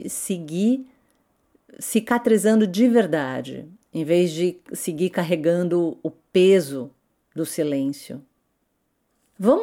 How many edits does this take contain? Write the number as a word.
zero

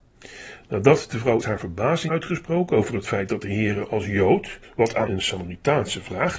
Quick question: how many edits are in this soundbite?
four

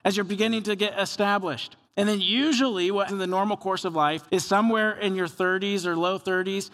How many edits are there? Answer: three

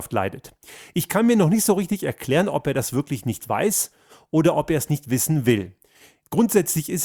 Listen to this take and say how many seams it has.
zero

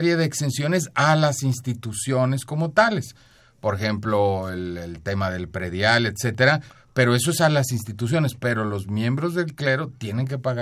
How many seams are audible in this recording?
zero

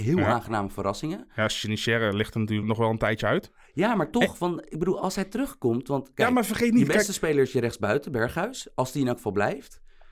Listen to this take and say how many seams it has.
one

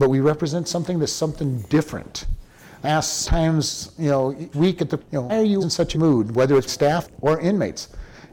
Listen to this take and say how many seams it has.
nine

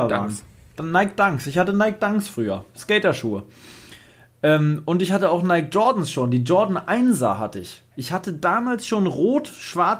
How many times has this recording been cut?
zero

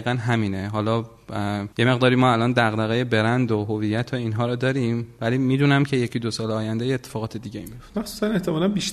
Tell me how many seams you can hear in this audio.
one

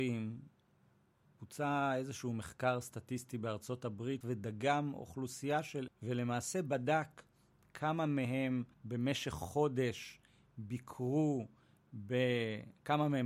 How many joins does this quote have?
three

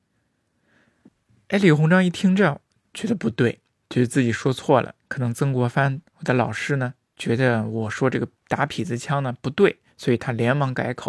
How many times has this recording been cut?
zero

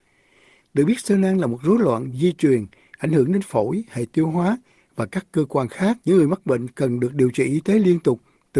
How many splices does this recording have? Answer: one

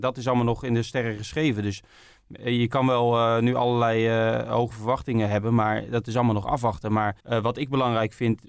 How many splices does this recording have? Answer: one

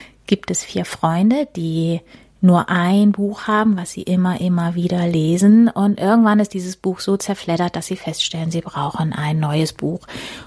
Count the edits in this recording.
zero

